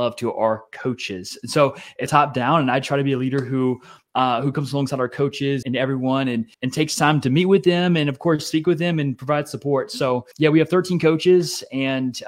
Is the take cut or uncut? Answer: cut